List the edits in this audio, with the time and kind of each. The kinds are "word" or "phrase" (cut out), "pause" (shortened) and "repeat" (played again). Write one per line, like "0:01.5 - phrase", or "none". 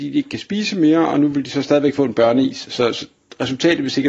none